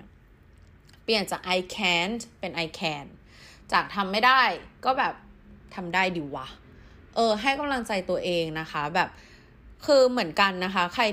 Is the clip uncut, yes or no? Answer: yes